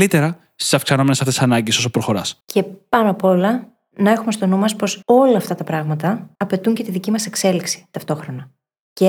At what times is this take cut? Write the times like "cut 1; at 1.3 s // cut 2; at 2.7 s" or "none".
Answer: cut 1; at 2.4 s // cut 2; at 5.0 s // cut 3; at 6.4 s

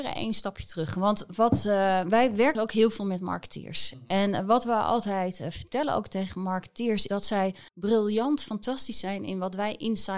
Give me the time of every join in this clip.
cut 1; at 2.5 s // cut 2; at 7.1 s // cut 3; at 7.7 s

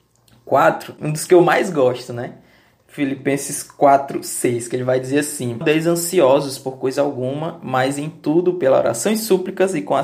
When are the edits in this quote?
cut 1; at 5.6 s

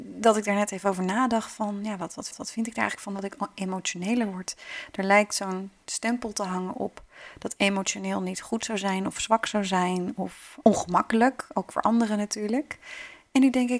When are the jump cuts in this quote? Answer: cut 1; at 2.3 s // cut 2; at 10.6 s

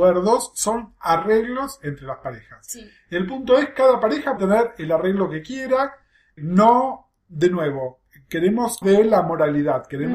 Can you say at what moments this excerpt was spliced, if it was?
cut 1; at 4.4 s // cut 2; at 6.4 s // cut 3; at 8.8 s

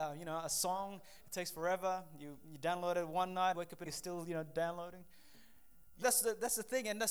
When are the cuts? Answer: cut 1; at 3.5 s // cut 2; at 3.9 s // cut 3; at 6.0 s

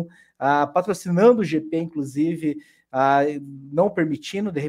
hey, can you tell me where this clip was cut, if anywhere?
none

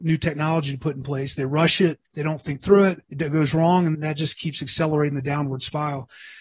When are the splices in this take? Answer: cut 1; at 2.0 s // cut 2; at 3.0 s // cut 3; at 3.9 s

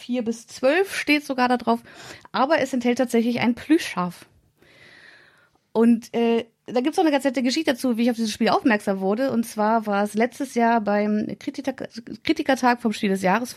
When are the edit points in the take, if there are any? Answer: none

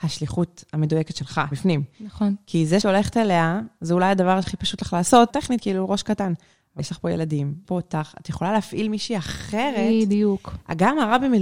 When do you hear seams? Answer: cut 1; at 1.5 s // cut 2; at 2.8 s // cut 3; at 4.4 s // cut 4; at 5.3 s // cut 5; at 6.8 s // cut 6; at 7.6 s

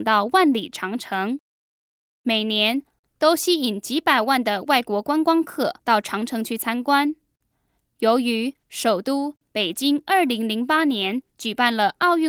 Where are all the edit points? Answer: cut 1; at 5.8 s // cut 2; at 8.6 s // cut 3; at 11.3 s

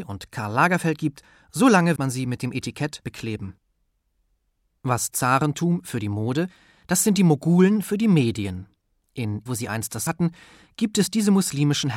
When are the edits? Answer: cut 1; at 2.0 s // cut 2; at 3.0 s // cut 3; at 5.1 s // cut 4; at 9.5 s // cut 5; at 10.1 s

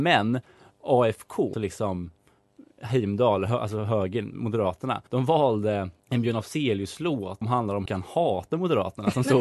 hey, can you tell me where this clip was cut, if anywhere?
cut 1; at 1.5 s // cut 2; at 5.1 s // cut 3; at 6.0 s // cut 4; at 7.4 s // cut 5; at 7.9 s

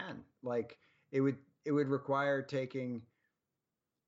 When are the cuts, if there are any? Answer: none

